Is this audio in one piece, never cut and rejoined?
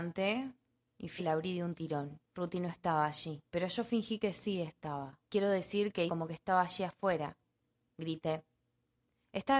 no; 5 cuts; at 1.2 s, 2.3 s, 3.5 s, 5.2 s, 6.1 s

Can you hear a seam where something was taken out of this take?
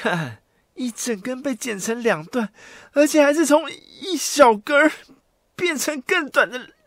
no; 0 cuts

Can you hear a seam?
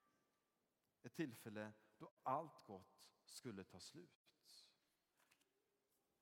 no; 0 cuts

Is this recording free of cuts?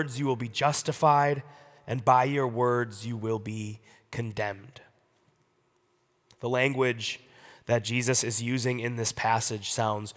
yes; 0 cuts

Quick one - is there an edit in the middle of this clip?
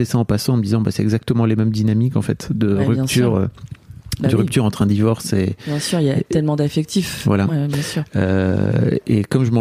no; 0 cuts

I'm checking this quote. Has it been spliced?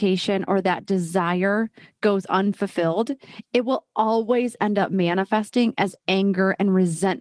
no; 0 cuts

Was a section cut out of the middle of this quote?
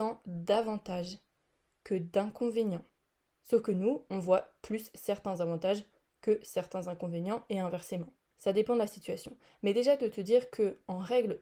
no; 0 cuts

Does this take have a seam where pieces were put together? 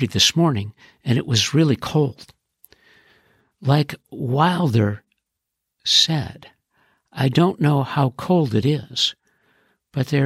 no; 0 cuts

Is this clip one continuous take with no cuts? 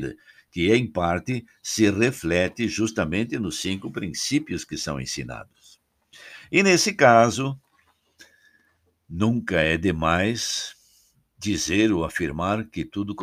yes; 0 cuts

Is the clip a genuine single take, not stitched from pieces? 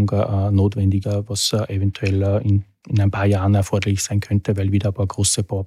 no; 1 cut; at 1.0 s

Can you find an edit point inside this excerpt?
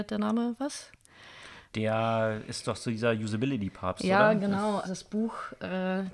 yes; 1 cut; at 4.8 s

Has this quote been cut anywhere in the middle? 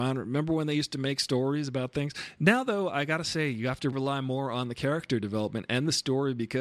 yes; 1 cut; at 3.9 s

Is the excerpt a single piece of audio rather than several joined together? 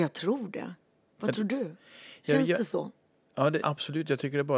no; 1 cut; at 3.6 s

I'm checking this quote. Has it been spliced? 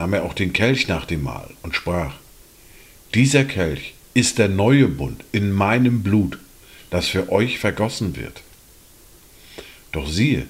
no; 0 cuts

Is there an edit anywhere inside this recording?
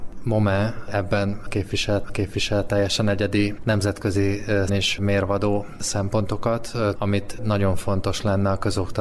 yes; 4 cuts; at 2.0 s, 3.6 s, 4.7 s, 6.9 s

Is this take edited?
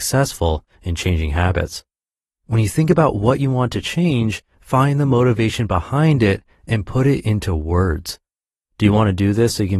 no; 0 cuts

